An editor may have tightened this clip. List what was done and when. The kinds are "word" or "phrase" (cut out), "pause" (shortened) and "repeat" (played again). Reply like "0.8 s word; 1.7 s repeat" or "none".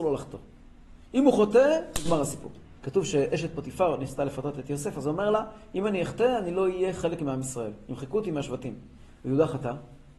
2.8 s pause